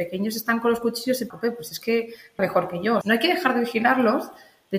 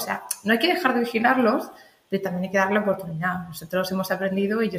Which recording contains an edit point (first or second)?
first